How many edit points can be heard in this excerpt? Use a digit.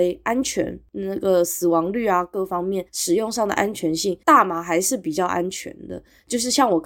1